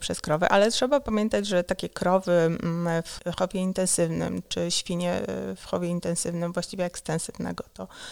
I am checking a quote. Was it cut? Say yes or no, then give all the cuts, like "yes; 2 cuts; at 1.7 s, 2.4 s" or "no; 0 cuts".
no; 0 cuts